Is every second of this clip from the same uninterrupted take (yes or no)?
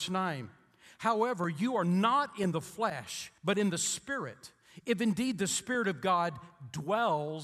no